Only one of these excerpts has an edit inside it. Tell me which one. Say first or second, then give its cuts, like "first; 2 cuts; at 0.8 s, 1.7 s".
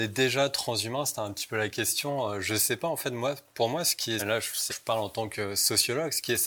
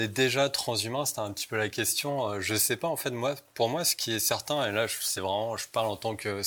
first; 2 cuts; at 4.2 s, 4.7 s